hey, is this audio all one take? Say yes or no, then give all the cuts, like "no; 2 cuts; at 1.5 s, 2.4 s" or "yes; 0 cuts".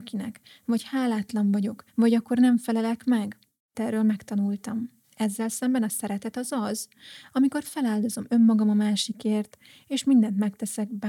no; 3 cuts; at 1.9 s, 3.7 s, 5.0 s